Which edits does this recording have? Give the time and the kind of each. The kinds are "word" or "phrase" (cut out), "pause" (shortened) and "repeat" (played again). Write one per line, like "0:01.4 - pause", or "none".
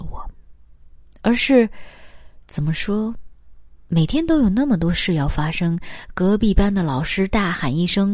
0:02.4 - pause